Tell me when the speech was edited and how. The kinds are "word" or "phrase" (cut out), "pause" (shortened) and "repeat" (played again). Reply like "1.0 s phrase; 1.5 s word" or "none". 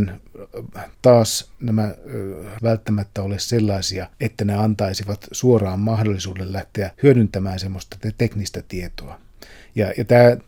0.9 s pause; 2.6 s phrase; 4.1 s pause; 6.9 s pause